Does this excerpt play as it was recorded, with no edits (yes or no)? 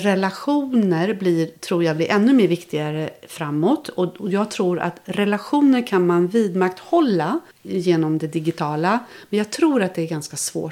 no